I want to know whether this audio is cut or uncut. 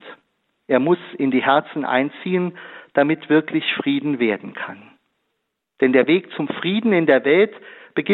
uncut